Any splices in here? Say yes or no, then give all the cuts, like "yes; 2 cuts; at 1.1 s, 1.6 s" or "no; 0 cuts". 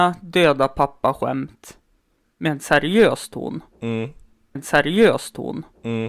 yes; 1 cut; at 4.6 s